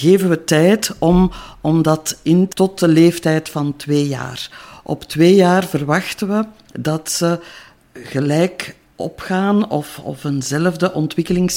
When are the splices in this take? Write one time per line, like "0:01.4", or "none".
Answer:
0:02.5

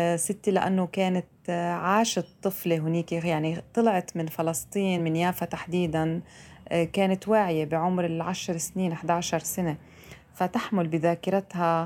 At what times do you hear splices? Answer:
none

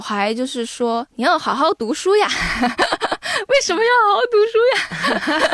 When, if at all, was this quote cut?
0:01.1

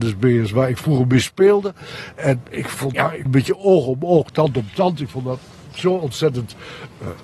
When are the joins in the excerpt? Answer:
0:02.5
0:02.9
0:03.3

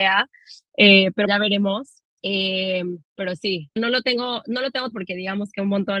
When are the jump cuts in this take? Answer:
0:01.3
0:03.0
0:03.8
0:04.9

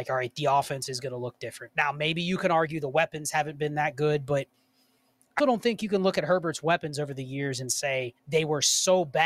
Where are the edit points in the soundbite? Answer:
0:05.4
0:08.2

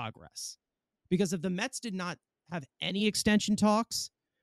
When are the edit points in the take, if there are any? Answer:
none

